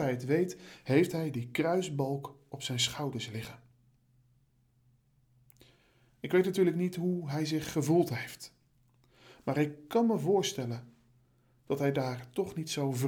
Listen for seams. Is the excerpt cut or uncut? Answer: uncut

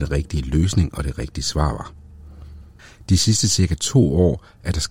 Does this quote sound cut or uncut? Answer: uncut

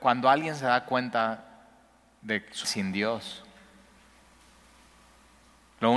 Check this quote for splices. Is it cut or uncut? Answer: cut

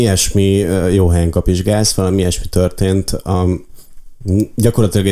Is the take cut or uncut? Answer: uncut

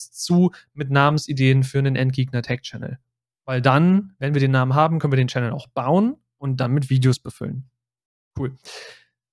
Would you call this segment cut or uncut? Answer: uncut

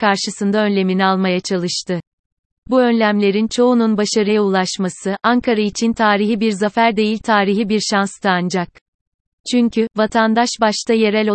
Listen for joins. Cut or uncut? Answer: uncut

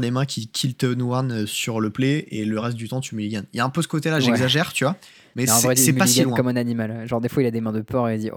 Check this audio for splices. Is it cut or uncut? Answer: uncut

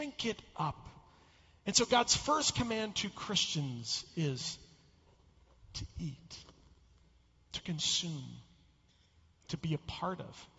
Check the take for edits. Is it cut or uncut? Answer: uncut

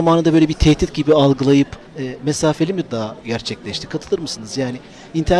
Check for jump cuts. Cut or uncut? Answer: cut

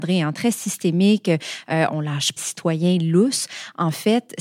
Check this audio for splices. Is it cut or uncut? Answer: cut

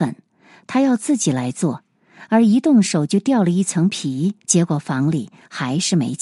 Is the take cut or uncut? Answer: cut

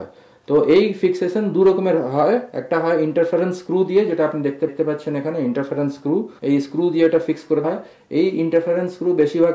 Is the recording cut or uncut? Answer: cut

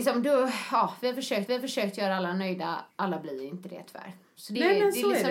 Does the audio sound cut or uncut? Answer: cut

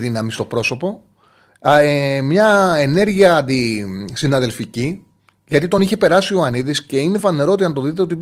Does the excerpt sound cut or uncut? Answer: uncut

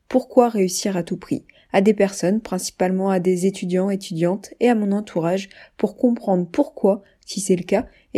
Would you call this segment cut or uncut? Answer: uncut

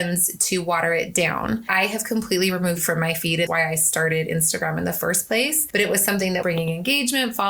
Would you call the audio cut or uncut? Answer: cut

